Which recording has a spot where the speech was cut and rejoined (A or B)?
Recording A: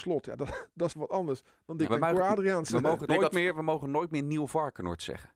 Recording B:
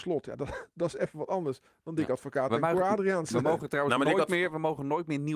A